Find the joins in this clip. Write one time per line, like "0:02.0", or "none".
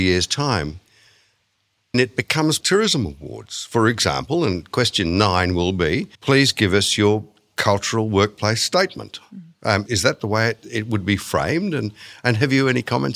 0:01.9
0:02.6
0:06.1
0:09.9